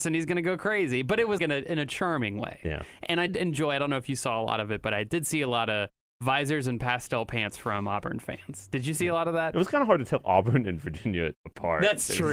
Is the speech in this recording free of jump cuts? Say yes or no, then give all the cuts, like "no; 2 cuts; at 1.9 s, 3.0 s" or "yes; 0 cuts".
no; 2 cuts; at 1.4 s, 3.3 s